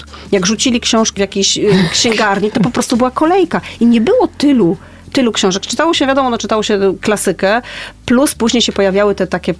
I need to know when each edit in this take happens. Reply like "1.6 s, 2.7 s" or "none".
1.2 s